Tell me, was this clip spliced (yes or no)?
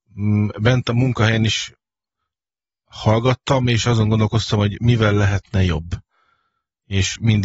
no